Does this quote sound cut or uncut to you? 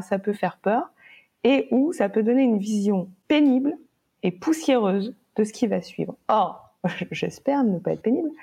uncut